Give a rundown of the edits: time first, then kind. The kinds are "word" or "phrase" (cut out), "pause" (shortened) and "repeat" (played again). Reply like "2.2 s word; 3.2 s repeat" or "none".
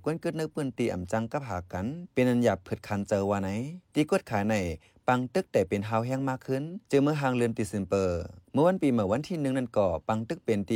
none